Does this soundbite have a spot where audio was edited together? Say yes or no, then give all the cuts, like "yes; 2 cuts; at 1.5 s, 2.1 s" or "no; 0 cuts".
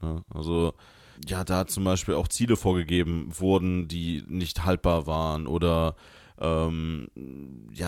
yes; 1 cut; at 1.2 s